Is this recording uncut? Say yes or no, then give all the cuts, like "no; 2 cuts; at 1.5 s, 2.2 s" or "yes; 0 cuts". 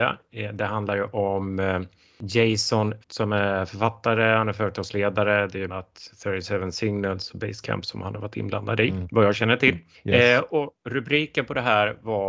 no; 3 cuts; at 3.0 s, 5.7 s, 9.9 s